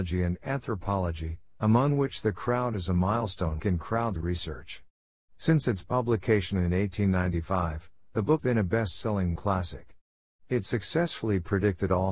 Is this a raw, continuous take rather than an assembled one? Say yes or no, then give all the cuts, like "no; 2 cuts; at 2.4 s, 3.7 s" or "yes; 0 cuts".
no; 4 cuts; at 3.6 s, 4.2 s, 8.4 s, 9.4 s